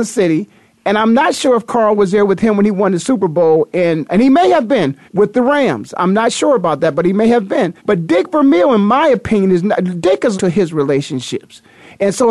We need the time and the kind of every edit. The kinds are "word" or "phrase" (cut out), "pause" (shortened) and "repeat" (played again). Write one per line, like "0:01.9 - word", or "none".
0:04.1 - word
0:05.1 - pause
0:07.8 - pause
0:10.3 - word

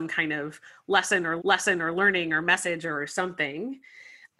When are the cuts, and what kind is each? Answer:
0:01.4 - repeat

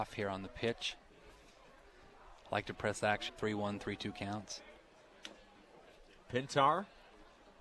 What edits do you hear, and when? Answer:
0:03.3 - word

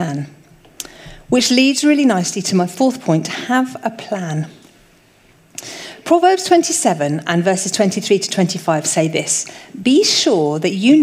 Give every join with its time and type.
none

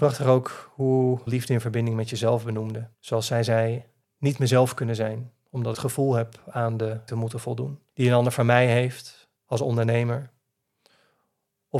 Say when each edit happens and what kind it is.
0:01.3 - phrase
0:02.9 - pause
0:04.0 - pause
0:05.7 - phrase
0:07.1 - word
0:07.9 - pause
0:09.4 - pause

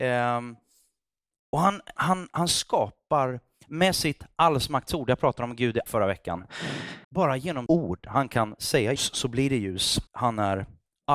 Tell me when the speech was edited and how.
0:02.0 - word
0:05.9 - word
0:07.0 - pause
0:07.7 - word
0:09.0 - word
0:10.1 - pause

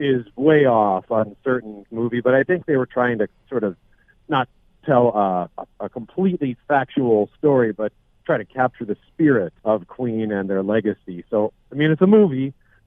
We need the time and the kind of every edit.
0:01.9 - phrase
0:09.6 - pause

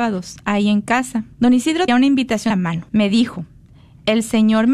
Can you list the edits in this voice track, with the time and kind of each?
0:01.3 - pause
0:01.9 - word
0:02.5 - word
0:02.9 - pause

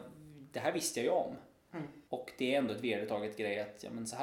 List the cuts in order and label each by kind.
0:02.1 - pause

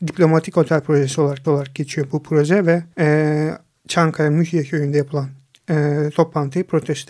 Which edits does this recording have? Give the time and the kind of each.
0:01.4 - repeat
0:02.9 - pause

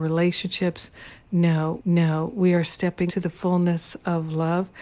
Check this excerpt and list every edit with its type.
0:01.8 - repeat
0:03.1 - word

